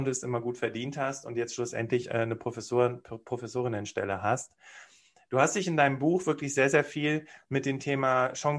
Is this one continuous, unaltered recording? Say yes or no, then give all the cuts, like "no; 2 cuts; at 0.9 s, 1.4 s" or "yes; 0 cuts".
yes; 0 cuts